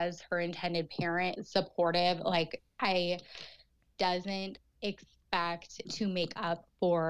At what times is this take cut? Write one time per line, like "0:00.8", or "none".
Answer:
0:01.3
0:03.9
0:05.8